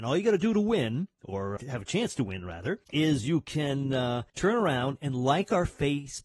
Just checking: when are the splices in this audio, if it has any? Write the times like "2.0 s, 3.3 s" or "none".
1.6 s, 2.8 s, 4.3 s